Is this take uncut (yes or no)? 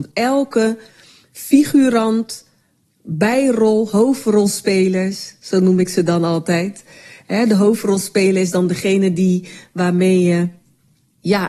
yes